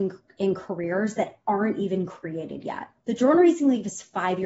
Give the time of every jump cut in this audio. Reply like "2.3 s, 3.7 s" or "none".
3.0 s